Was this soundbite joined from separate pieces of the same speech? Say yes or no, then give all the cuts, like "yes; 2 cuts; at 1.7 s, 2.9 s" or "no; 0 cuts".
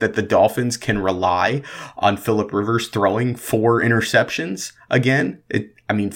no; 0 cuts